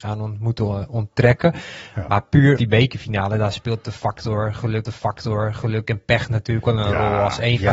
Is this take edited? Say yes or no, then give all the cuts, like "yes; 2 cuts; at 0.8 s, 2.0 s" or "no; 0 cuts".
yes; 3 cuts; at 2.6 s, 4.9 s, 6.6 s